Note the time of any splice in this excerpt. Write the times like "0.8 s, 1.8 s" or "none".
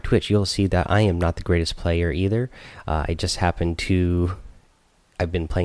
none